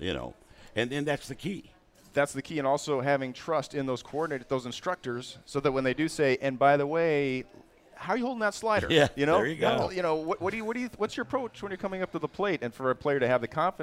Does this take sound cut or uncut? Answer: uncut